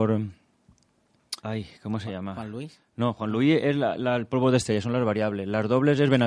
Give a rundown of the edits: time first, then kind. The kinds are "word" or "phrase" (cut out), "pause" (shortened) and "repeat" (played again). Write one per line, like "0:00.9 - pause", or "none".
0:01.4 - pause